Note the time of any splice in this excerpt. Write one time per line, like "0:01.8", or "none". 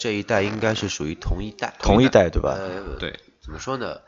none